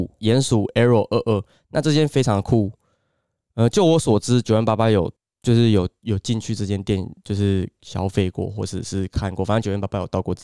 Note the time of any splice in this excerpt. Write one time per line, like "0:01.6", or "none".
0:05.2